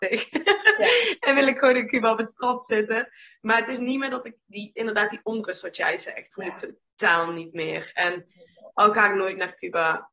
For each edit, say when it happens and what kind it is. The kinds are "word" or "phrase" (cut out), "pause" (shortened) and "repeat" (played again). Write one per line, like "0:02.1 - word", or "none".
0:06.3 - word